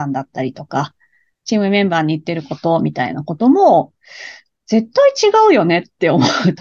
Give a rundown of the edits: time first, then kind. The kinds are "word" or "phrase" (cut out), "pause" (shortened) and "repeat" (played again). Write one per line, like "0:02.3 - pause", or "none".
none

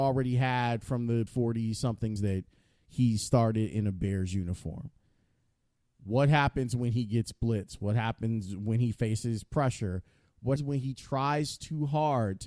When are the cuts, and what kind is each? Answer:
0:01.3 - word
0:02.2 - word
0:10.6 - word

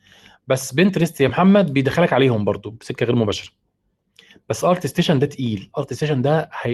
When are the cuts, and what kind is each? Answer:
none

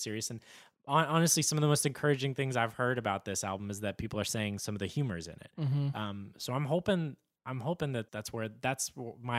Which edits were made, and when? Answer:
0:08.1 - word

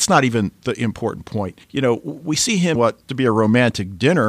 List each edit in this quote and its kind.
0:01.6 - pause
0:02.8 - word
0:03.1 - phrase

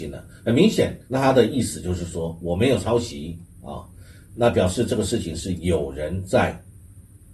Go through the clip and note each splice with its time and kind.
0:01.0 - pause

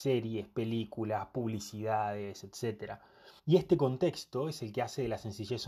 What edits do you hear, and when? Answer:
0:03.4 - pause

